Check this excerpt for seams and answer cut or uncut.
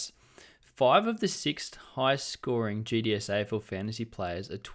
uncut